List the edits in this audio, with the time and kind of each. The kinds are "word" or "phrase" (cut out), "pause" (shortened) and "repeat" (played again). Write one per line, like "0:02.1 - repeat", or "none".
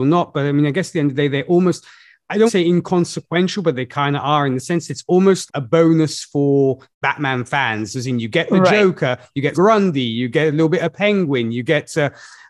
0:02.5 - phrase
0:05.5 - word
0:06.9 - pause
0:09.5 - word